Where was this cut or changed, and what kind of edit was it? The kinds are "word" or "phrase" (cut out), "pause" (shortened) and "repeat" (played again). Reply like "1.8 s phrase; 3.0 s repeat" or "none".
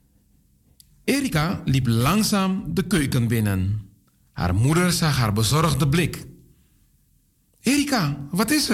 none